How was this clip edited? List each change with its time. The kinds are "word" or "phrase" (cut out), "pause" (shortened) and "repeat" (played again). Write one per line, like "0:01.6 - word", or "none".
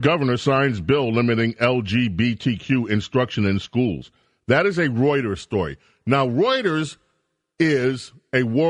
none